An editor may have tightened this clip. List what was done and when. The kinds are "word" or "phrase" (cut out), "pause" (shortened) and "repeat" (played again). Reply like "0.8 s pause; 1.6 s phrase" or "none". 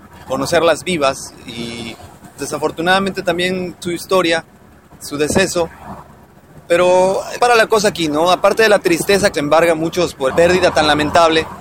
2.4 s word; 3.8 s word; 7.4 s word; 9.3 s word; 10.3 s word